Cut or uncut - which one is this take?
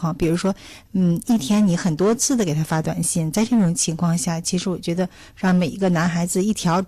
uncut